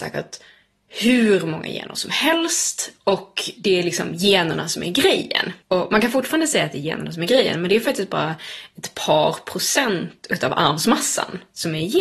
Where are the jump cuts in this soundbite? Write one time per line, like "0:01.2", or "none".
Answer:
0:05.6